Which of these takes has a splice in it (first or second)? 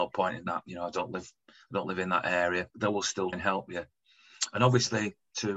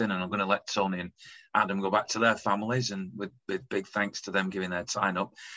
first